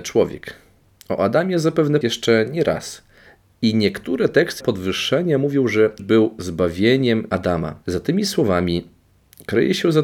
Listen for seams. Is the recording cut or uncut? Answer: cut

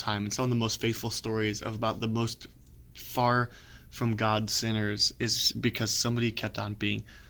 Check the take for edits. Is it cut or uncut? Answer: uncut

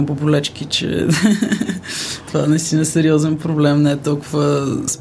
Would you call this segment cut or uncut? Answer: uncut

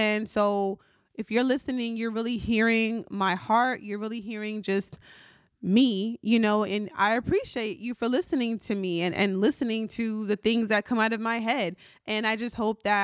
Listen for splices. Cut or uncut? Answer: uncut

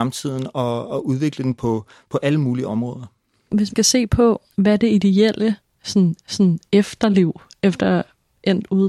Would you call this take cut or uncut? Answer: cut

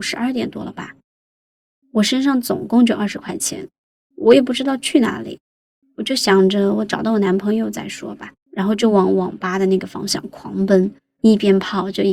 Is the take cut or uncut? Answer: cut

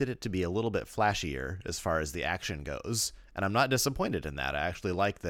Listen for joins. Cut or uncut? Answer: uncut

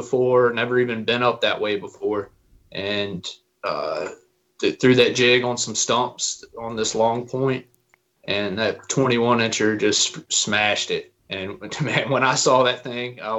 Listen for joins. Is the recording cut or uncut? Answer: cut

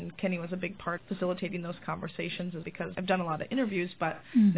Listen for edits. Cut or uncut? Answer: cut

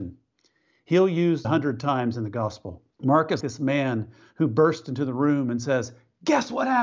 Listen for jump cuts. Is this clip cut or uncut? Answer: cut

